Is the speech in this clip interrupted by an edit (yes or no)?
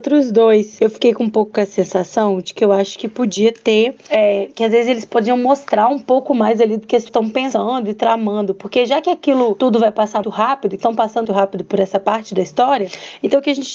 yes